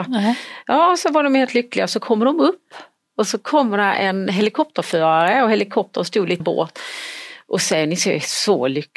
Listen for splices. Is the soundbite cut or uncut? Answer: cut